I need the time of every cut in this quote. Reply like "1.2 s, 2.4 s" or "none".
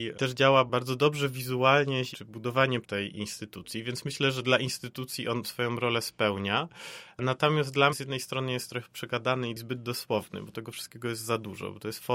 2.1 s, 2.8 s, 5.4 s, 7.9 s, 10.5 s